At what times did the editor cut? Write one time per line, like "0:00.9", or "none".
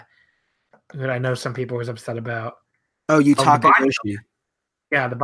none